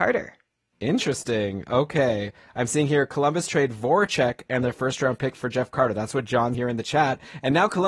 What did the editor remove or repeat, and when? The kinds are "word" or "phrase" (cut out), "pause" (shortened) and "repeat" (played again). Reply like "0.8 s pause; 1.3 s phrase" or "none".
6.5 s word